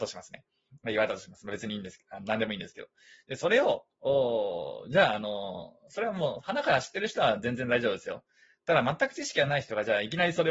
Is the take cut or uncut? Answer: uncut